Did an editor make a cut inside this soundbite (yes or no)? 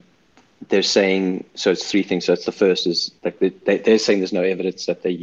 yes